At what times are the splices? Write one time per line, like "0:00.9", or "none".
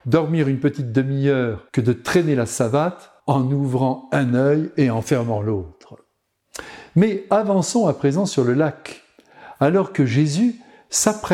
0:01.7
0:03.2